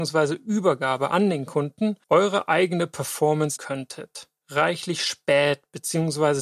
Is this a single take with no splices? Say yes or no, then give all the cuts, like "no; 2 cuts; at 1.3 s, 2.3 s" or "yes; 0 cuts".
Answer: no; 3 cuts; at 2.0 s, 3.6 s, 4.4 s